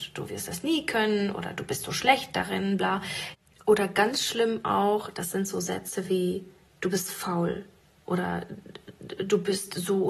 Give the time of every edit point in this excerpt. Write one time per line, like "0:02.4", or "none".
none

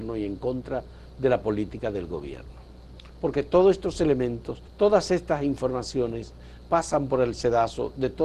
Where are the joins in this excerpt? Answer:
0:04.7

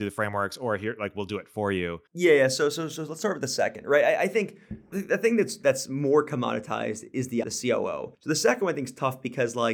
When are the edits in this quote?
0:02.1
0:04.9
0:07.4
0:08.1

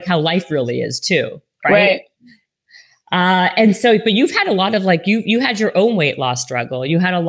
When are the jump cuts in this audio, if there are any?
none

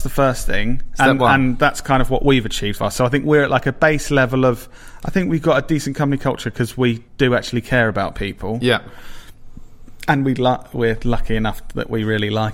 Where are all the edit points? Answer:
0:02.8
0:07.1

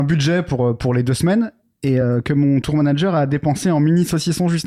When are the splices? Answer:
none

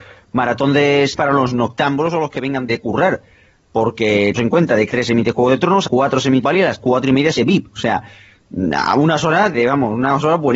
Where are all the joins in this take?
0:01.1
0:02.7
0:04.4
0:04.9
0:05.9
0:06.4
0:07.4
0:09.5

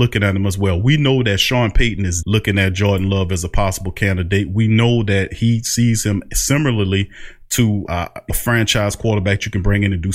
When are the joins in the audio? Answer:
0:02.2
0:07.9
0:08.3

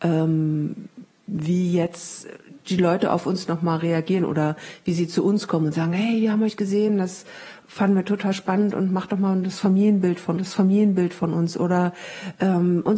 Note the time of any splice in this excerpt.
0:10.4

